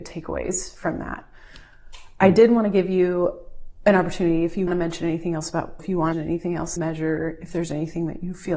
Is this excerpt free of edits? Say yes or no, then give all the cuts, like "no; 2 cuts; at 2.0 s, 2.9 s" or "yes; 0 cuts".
no; 4 cuts; at 4.7 s, 5.8 s, 6.1 s, 6.8 s